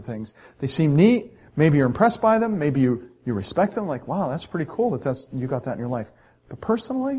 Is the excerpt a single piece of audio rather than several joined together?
yes; 0 cuts

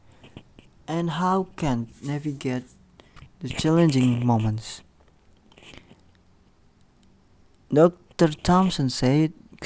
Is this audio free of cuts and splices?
no; 1 cut; at 1.9 s

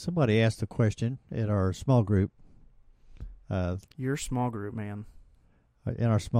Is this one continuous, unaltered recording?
no; 1 cut; at 3.9 s

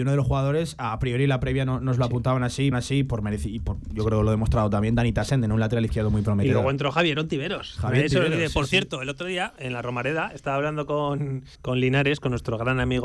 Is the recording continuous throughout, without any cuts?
no; 2 cuts; at 2.7 s, 11.5 s

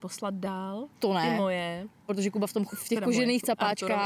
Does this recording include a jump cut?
yes; 2 cuts; at 0.9 s, 2.7 s

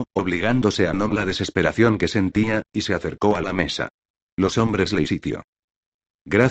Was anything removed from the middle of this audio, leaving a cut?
yes; 2 cuts; at 1.1 s, 5.1 s

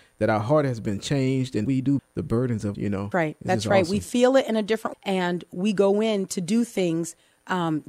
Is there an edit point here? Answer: yes; 5 cuts; at 1.6 s, 2.0 s, 2.7 s, 3.1 s, 4.9 s

